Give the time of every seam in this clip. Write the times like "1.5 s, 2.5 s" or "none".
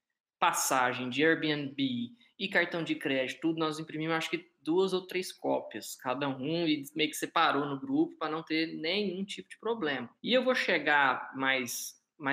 10.2 s